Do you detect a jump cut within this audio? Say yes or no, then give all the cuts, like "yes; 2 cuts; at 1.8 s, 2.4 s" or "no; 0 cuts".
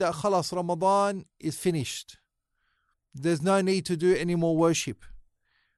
no; 0 cuts